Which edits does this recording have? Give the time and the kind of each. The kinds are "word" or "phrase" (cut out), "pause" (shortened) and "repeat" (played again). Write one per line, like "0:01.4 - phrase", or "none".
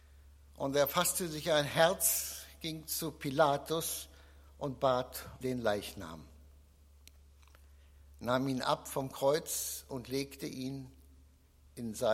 0:05.4 - word